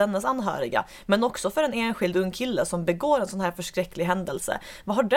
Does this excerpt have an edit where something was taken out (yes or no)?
no